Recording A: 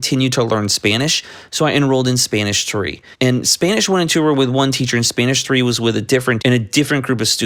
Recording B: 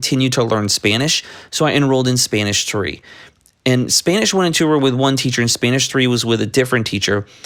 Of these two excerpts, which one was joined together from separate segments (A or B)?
A